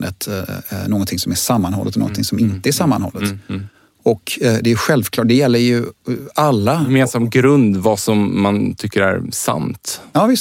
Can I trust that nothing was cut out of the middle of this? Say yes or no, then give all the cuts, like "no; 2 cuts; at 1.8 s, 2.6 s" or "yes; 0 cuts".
yes; 0 cuts